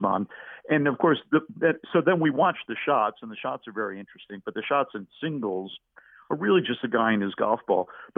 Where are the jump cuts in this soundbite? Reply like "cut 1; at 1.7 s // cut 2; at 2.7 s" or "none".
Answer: none